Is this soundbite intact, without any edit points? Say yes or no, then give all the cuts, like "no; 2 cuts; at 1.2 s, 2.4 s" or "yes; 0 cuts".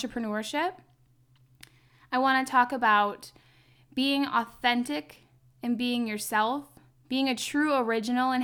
yes; 0 cuts